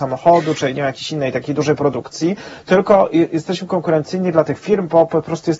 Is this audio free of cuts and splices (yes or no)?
yes